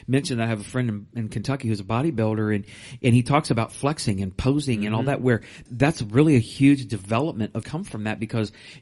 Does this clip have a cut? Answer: yes; 2 cuts; at 5.7 s, 7.6 s

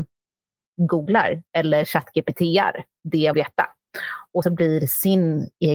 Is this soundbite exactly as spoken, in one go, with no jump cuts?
no; 2 cuts; at 3.3 s, 4.4 s

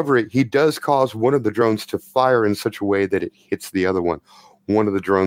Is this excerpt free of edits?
yes; 0 cuts

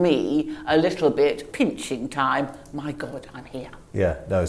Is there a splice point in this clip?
yes; 1 cut; at 1.5 s

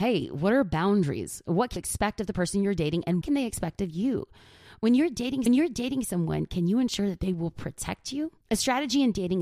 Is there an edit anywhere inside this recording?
yes; 4 cuts; at 1.8 s, 3.2 s, 5.5 s, 8.4 s

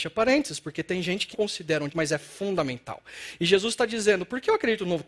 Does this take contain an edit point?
yes; 2 cuts; at 1.3 s, 1.9 s

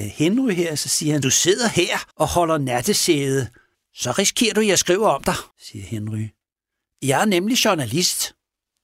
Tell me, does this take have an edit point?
yes; 4 cuts; at 1.2 s, 2.1 s, 3.7 s, 5.5 s

